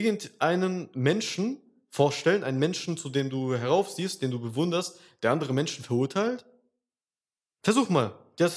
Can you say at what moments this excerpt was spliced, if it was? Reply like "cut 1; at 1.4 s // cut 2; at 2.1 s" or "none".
none